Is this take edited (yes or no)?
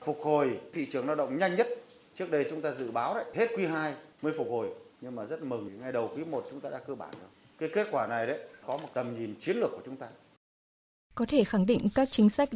no